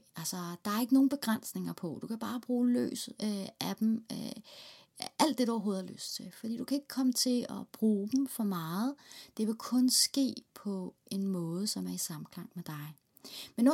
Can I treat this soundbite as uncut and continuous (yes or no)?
yes